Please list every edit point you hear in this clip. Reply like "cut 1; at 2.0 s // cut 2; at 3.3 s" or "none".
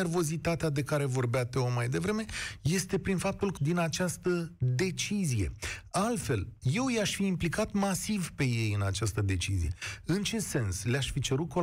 cut 1; at 3.6 s